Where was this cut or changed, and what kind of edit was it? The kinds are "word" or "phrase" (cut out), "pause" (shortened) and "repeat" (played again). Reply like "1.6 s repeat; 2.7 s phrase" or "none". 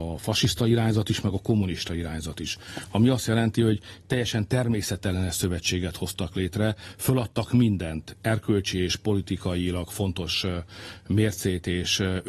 none